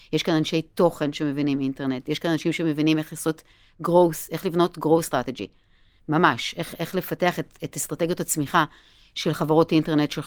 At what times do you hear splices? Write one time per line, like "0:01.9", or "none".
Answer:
none